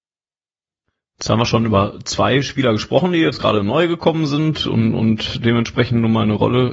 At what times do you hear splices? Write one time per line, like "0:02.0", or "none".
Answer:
none